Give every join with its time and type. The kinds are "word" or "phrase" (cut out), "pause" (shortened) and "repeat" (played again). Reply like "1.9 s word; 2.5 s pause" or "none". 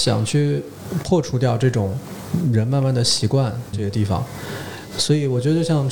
3.7 s word